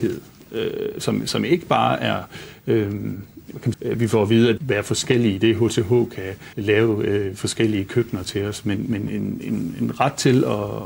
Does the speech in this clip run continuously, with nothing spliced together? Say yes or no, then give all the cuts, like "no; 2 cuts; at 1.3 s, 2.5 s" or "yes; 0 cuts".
no; 3 cuts; at 3.7 s, 4.6 s, 6.5 s